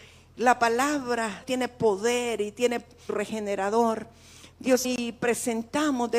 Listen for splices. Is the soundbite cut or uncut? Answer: cut